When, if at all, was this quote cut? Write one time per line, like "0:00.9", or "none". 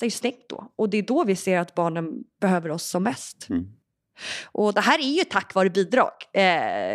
none